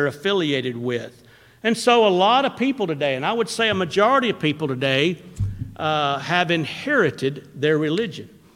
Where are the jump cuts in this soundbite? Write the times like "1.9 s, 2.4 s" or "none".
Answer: none